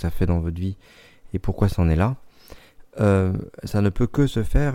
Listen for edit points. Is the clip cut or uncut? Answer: uncut